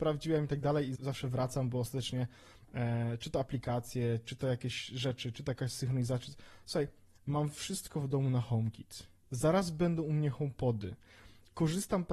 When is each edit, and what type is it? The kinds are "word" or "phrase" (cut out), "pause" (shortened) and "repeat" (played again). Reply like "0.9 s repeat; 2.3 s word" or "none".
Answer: 1.0 s word